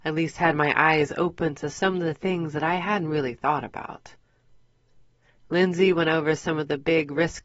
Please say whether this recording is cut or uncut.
uncut